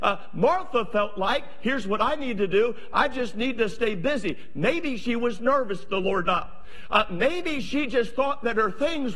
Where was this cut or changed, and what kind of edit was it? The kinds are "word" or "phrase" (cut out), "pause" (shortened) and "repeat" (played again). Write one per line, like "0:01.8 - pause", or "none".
0:06.3 - word